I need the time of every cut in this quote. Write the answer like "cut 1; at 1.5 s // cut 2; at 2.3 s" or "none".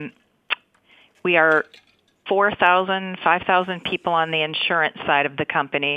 cut 1; at 2.3 s